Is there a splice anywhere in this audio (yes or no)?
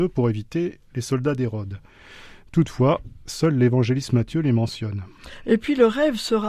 no